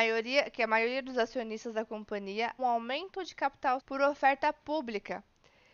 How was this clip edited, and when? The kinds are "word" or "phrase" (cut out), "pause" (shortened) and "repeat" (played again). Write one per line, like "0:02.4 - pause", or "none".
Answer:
0:02.6 - word
0:03.8 - word